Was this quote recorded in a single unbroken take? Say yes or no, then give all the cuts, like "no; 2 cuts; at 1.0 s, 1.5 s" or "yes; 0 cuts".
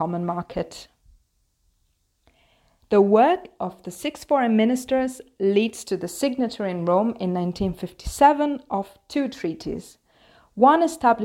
yes; 0 cuts